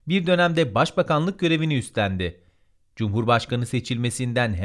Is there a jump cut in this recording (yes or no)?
no